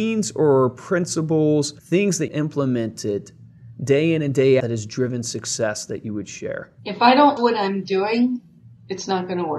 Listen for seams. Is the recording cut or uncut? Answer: cut